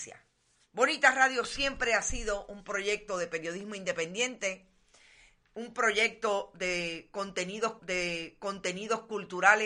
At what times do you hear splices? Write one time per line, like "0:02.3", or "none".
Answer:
0:07.8